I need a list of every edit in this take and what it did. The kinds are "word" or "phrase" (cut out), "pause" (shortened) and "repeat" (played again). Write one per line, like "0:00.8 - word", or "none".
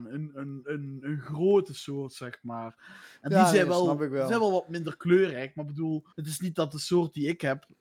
0:06.1 - pause